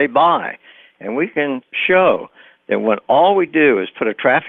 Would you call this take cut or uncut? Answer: uncut